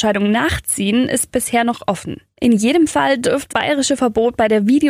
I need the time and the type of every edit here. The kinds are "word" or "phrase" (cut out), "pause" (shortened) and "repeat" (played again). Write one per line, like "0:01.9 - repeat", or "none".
0:03.5 - word